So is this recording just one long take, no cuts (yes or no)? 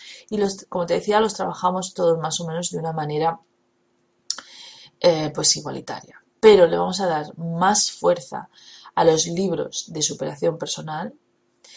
yes